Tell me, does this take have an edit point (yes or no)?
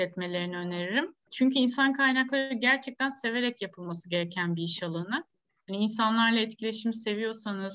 no